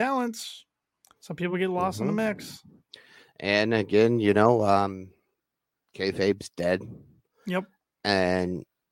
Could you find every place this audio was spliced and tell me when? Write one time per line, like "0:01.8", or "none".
none

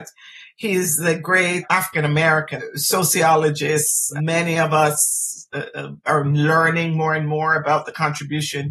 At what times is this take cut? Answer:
none

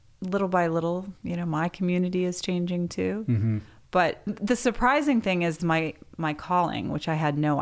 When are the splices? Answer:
0:01.2
0:04.3
0:05.6

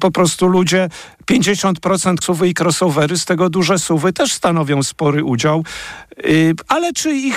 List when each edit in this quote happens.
0:02.2

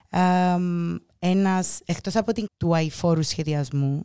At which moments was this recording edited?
0:02.5

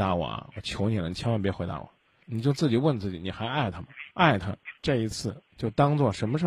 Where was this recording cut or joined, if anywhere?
0:02.2
0:04.1
0:04.8
0:05.5

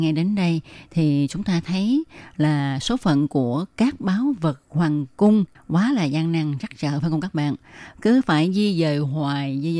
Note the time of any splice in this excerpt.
none

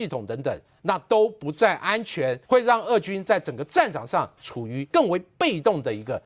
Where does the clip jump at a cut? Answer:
0:02.4

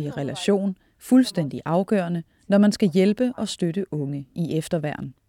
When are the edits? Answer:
none

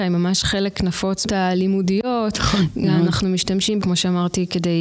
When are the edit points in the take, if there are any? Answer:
0:01.2
0:03.8

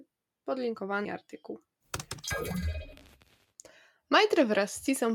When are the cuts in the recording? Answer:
0:01.0

